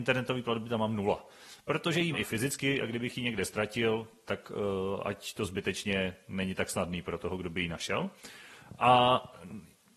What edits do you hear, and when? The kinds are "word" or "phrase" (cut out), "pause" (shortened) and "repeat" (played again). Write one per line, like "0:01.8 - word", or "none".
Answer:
0:02.1 - word
0:04.3 - word